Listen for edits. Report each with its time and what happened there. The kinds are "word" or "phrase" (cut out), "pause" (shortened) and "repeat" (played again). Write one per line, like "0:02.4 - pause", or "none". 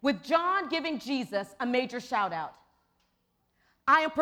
none